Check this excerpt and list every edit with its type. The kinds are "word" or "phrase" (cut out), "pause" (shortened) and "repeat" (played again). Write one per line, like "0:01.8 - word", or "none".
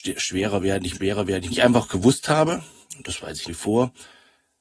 0:00.9 - word
0:01.5 - phrase
0:03.5 - word